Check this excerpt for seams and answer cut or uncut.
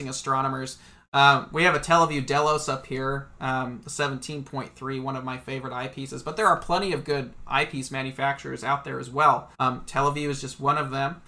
cut